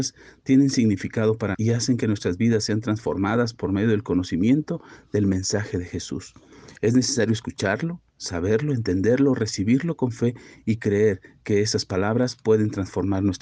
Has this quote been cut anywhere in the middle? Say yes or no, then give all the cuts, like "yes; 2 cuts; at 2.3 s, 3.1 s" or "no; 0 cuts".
yes; 1 cut; at 1.5 s